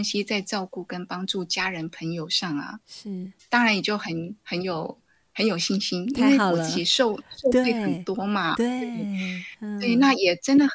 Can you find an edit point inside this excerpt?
no; 0 cuts

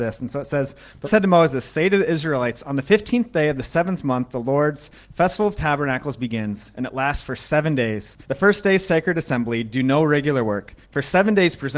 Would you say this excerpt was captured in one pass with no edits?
no; 3 cuts; at 1.0 s, 8.2 s, 10.8 s

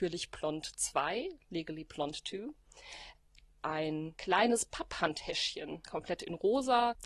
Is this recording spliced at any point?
no; 0 cuts

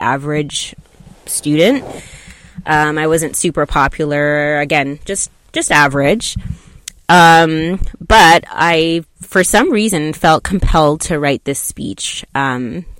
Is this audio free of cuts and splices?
yes; 0 cuts

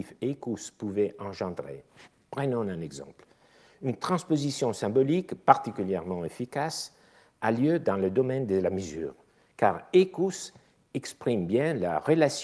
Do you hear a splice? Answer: no; 0 cuts

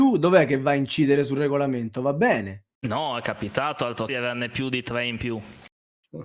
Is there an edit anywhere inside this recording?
yes; 2 cuts; at 2.8 s, 4.1 s

